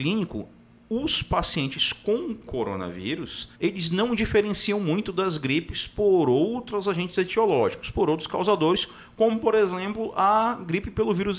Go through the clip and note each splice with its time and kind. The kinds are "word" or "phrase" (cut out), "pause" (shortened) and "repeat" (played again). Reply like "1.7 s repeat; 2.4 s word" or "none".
3.5 s pause